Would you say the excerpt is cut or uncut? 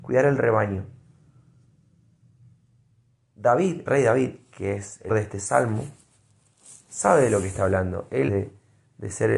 cut